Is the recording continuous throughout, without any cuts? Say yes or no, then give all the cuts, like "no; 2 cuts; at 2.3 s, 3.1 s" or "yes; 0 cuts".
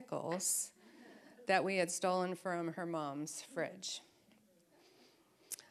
yes; 0 cuts